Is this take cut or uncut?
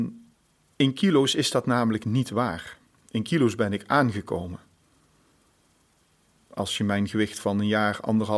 uncut